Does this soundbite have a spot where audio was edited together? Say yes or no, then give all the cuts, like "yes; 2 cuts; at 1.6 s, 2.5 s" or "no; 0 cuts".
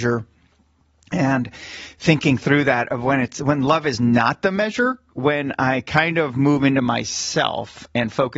no; 0 cuts